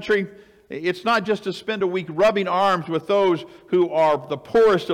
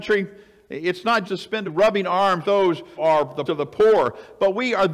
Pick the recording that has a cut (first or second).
second